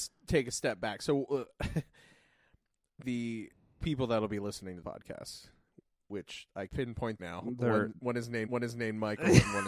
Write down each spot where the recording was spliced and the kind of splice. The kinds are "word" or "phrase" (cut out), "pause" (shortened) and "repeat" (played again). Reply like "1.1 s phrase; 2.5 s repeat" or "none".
3.0 s word; 3.8 s word; 4.8 s word; 6.7 s word; 7.2 s phrase; 8.5 s repeat